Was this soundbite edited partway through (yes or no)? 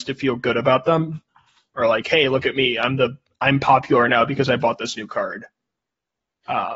no